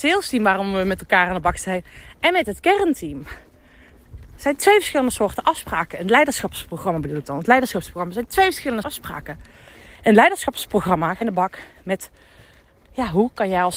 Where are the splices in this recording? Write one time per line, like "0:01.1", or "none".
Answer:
0:08.8
0:11.2

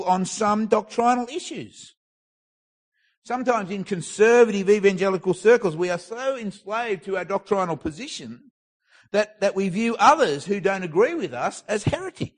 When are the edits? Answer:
none

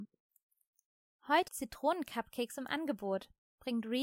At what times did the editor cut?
0:01.5

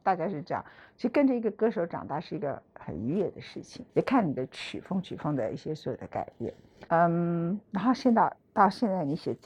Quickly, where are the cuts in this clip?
0:03.9
0:06.9
0:07.6

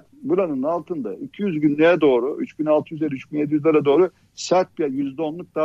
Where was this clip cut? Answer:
none

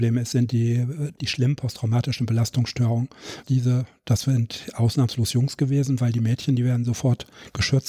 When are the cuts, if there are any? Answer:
0:01.2
0:03.4

